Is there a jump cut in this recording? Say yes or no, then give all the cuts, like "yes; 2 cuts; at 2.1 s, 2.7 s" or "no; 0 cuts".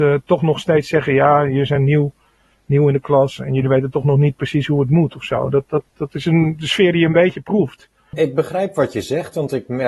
no; 0 cuts